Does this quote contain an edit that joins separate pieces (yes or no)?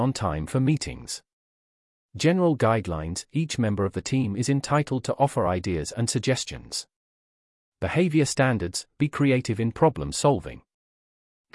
no